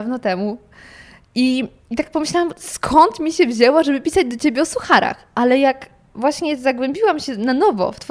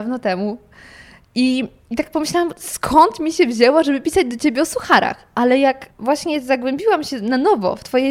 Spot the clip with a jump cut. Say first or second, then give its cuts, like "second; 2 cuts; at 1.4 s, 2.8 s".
second; 1 cut; at 5.9 s